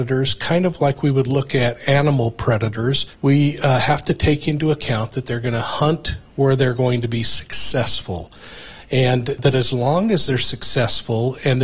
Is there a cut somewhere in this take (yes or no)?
yes